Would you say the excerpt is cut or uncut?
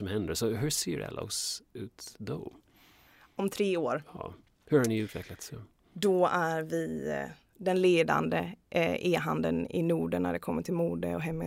uncut